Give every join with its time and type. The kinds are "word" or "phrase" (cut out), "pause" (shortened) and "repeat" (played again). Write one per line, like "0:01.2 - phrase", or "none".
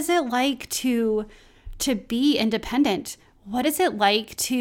none